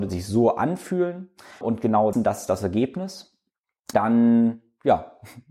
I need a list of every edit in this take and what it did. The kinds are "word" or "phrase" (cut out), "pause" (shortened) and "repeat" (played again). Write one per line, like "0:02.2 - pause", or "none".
0:01.6 - word
0:02.1 - word
0:03.9 - word